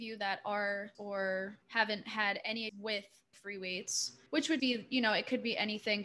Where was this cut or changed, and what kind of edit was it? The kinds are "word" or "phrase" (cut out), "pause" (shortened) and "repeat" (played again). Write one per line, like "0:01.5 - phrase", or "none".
0:00.9 - word
0:01.6 - pause
0:02.7 - word
0:03.3 - word
0:04.3 - pause
0:04.6 - word